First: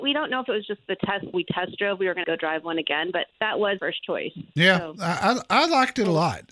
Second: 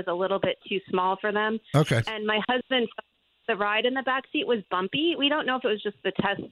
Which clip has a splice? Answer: first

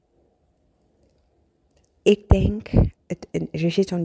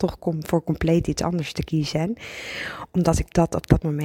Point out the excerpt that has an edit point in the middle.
first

